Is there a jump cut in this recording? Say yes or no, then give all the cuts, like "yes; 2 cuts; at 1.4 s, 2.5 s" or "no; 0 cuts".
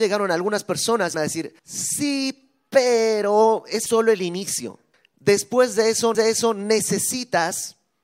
yes; 5 cuts; at 1.1 s, 1.6 s, 3.9 s, 4.9 s, 6.1 s